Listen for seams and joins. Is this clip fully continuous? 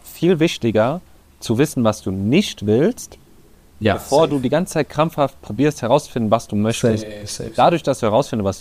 yes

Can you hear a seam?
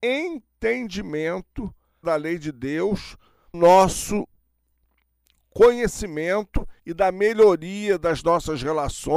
yes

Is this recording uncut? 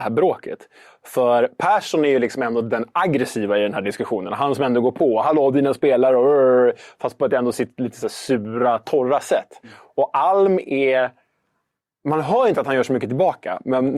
yes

